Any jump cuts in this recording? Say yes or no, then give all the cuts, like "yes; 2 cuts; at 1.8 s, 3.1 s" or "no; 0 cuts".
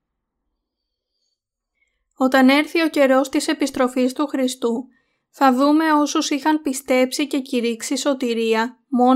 no; 0 cuts